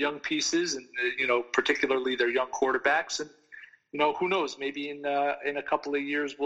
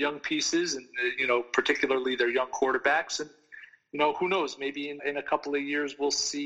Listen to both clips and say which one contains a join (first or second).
second